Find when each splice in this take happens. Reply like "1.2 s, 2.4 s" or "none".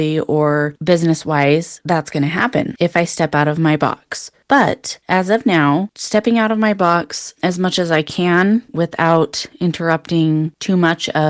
8.7 s